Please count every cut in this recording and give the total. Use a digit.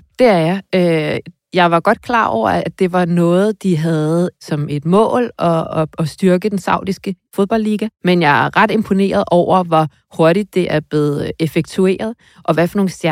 1